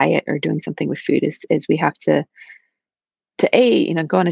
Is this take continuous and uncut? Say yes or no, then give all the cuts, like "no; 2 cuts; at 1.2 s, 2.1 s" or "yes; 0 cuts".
yes; 0 cuts